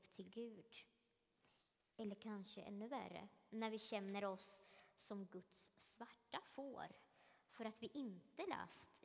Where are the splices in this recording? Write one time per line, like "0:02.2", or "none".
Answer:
none